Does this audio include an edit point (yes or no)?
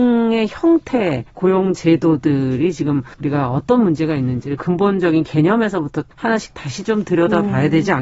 yes